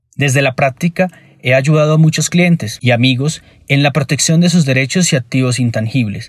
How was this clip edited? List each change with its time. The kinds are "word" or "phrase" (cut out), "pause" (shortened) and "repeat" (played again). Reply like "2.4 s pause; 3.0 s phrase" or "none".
none